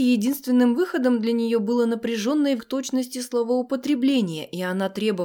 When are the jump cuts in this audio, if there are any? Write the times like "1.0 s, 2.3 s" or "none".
2.6 s